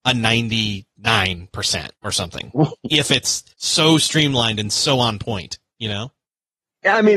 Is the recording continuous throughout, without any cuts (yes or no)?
no